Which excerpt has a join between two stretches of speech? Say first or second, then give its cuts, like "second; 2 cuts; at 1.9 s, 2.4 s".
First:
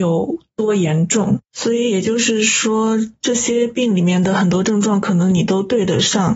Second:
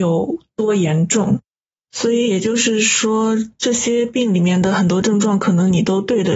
first; 1 cut; at 1.4 s